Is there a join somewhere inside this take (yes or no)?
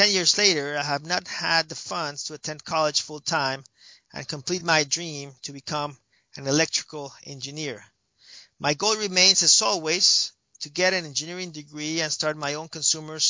no